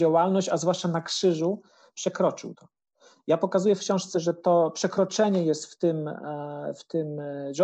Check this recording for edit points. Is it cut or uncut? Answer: uncut